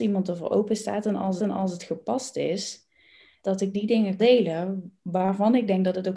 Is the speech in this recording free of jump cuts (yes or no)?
no